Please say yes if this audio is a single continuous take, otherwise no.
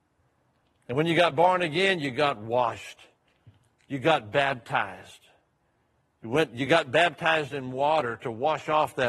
yes